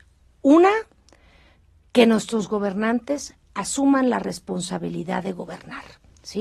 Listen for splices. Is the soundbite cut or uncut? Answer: uncut